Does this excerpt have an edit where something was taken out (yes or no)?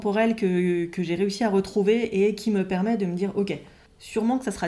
no